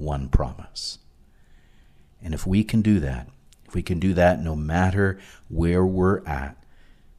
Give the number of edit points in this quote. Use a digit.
0